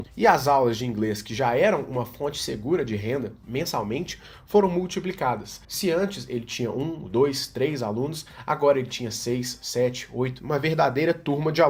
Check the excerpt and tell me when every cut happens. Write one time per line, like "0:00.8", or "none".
0:05.6